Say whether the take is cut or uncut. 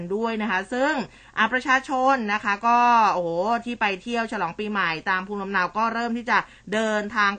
uncut